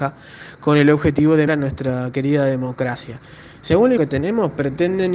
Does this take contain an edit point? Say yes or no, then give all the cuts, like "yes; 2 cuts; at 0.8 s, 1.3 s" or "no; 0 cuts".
yes; 2 cuts; at 1.5 s, 4.0 s